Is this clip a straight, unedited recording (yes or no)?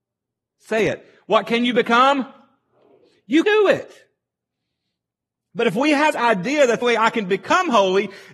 no